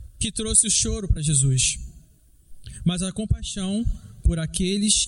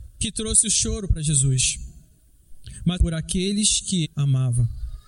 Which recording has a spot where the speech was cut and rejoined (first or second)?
second